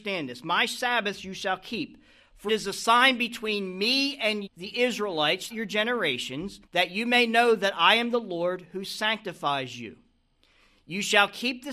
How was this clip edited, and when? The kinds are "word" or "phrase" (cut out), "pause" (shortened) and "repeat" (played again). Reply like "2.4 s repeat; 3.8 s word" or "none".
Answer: 2.5 s word; 4.5 s word; 5.5 s word; 6.7 s pause

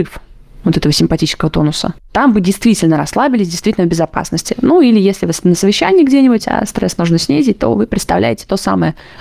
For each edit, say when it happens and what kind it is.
none

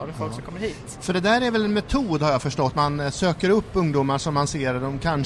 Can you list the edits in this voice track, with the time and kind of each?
2.7 s word

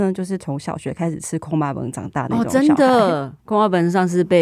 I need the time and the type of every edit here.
3.4 s word

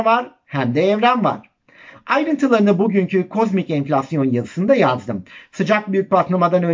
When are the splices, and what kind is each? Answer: none

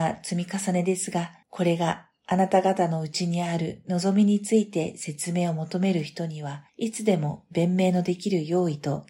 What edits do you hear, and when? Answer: 1.4 s pause; 6.7 s pause

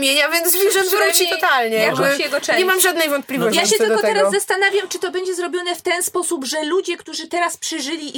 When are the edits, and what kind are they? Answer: none

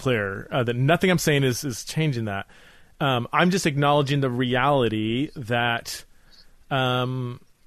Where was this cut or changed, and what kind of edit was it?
none

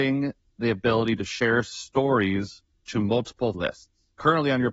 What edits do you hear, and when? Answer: 3.5 s word

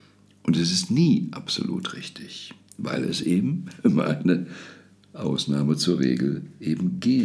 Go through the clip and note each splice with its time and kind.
none

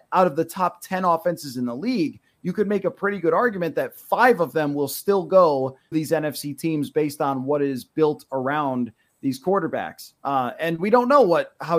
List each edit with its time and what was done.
5.9 s word

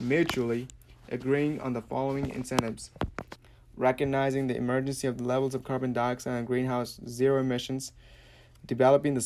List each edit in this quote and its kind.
none

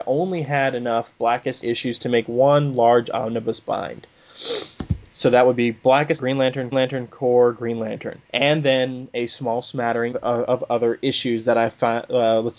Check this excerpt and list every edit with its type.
1.6 s word; 6.2 s word; 6.7 s repeat; 8.2 s pause; 10.1 s word

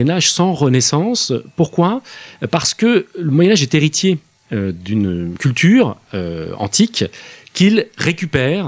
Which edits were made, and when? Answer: none

